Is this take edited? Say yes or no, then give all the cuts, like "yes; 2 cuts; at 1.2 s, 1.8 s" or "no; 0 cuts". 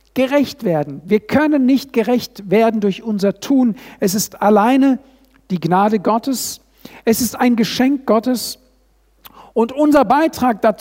no; 0 cuts